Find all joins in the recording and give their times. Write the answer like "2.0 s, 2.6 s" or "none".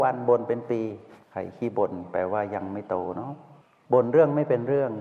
1.2 s, 3.6 s